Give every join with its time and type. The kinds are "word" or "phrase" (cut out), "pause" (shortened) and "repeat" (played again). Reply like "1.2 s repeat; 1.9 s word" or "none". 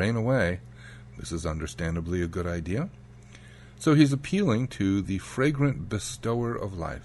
none